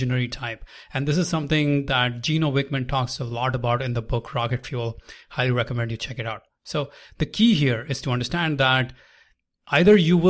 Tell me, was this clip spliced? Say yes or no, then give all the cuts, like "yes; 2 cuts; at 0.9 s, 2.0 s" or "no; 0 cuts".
no; 0 cuts